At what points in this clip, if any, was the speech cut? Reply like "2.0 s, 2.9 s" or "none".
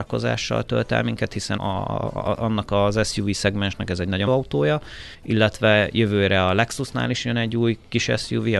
1.6 s, 4.3 s, 5.1 s